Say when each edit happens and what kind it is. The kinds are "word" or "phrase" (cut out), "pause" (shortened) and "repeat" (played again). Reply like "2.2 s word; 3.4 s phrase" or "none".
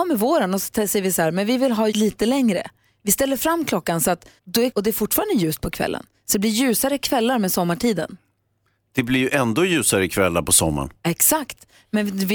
1.9 s word; 4.4 s pause; 4.7 s phrase